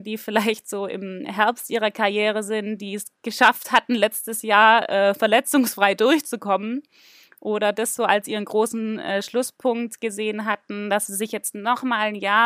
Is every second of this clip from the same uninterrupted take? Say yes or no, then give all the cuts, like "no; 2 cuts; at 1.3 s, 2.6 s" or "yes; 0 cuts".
yes; 0 cuts